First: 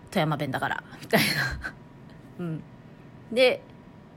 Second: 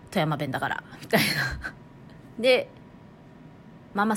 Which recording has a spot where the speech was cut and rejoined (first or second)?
second